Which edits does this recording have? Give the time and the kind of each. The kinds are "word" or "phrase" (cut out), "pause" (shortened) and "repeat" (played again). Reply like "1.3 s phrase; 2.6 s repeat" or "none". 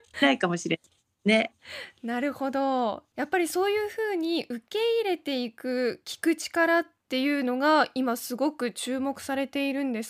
none